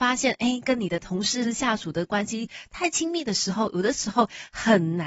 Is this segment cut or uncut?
cut